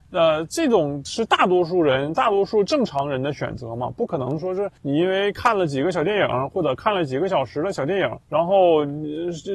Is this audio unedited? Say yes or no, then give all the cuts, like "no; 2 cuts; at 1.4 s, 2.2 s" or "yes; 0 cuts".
no; 2 cuts; at 4.8 s, 8.2 s